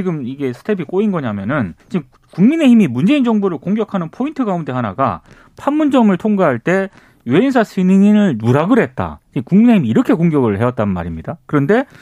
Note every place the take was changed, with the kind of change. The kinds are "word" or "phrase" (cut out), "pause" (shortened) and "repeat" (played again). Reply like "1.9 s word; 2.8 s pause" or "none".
1.8 s pause